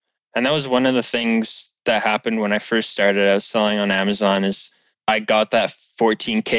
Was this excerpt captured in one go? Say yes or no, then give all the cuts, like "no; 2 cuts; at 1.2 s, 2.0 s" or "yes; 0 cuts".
yes; 0 cuts